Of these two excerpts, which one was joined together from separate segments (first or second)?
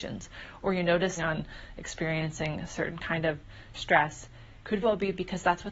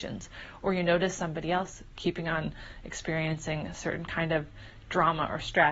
first